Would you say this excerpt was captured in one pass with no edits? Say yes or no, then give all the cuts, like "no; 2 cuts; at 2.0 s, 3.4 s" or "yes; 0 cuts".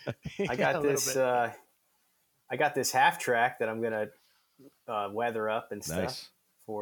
yes; 0 cuts